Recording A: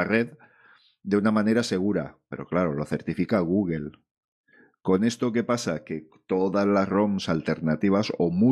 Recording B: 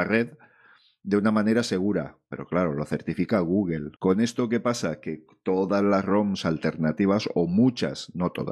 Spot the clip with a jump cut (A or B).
B